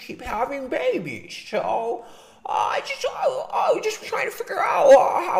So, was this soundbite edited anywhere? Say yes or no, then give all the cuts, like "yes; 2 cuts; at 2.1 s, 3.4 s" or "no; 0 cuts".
no; 0 cuts